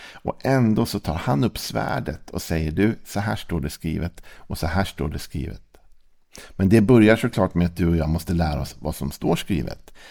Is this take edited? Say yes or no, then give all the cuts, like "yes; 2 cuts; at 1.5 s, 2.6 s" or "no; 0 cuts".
no; 0 cuts